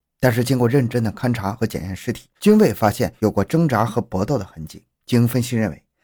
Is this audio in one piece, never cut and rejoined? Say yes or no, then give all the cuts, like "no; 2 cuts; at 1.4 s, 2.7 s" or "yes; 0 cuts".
no; 2 cuts; at 2.3 s, 4.9 s